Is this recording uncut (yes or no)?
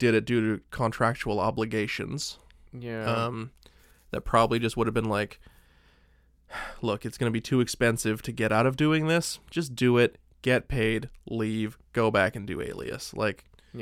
yes